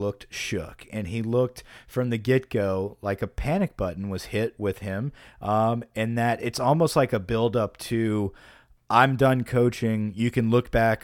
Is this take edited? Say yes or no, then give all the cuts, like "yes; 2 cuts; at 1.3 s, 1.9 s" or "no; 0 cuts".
no; 0 cuts